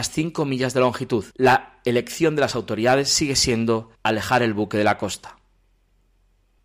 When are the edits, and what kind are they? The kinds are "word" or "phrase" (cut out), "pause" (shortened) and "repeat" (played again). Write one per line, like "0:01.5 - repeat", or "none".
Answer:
0:01.3 - pause
0:03.9 - pause